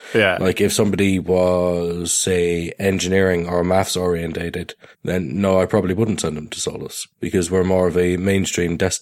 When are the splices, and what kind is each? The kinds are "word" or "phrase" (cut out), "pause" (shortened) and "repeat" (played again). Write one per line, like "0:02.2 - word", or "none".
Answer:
0:04.9 - pause
0:07.1 - pause